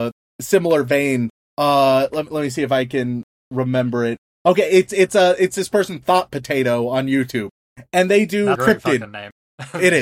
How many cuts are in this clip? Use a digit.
1